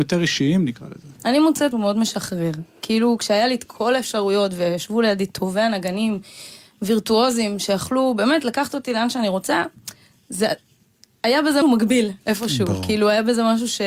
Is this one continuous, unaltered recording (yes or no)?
no